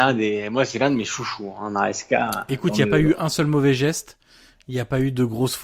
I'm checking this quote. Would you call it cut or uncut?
uncut